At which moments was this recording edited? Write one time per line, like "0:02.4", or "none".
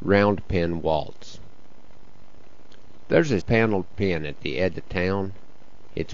0:03.4
0:04.7

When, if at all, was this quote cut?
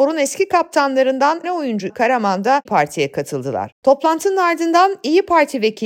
0:01.4
0:01.9
0:02.7

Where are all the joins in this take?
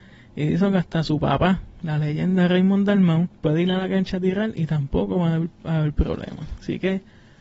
0:03.3

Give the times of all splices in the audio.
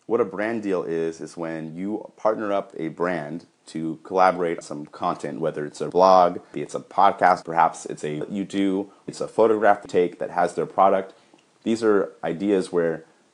0:02.7
0:04.6
0:05.9
0:06.5
0:07.4
0:08.2
0:09.1
0:09.9

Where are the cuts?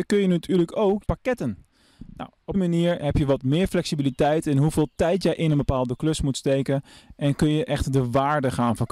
0:01.0
0:02.5

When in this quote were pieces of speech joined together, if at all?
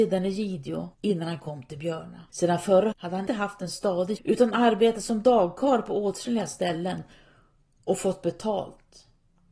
0:00.9
0:02.3
0:02.9
0:03.3
0:04.2

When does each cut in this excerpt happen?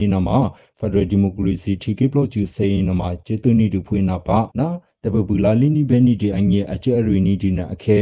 0:04.5

